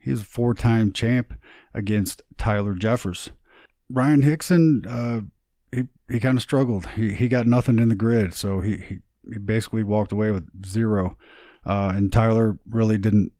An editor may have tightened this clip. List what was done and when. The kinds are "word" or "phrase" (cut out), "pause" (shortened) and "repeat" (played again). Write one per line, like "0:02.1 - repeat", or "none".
none